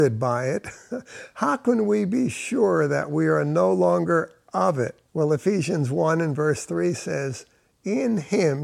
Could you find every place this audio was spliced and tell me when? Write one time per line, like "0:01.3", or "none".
0:05.1